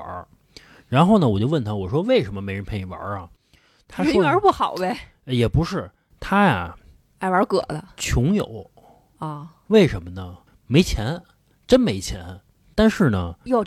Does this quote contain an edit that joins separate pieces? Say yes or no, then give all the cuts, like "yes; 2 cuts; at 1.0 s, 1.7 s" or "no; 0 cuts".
no; 0 cuts